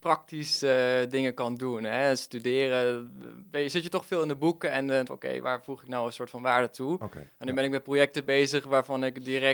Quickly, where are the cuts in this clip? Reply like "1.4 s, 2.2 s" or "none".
5.1 s, 5.4 s